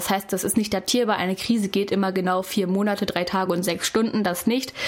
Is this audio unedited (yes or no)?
yes